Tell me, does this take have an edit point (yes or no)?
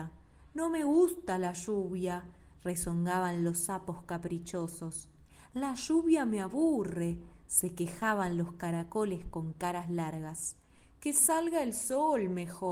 no